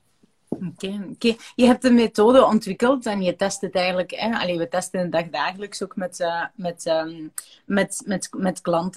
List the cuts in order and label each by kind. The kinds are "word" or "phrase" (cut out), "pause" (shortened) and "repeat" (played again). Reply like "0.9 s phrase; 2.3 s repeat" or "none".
none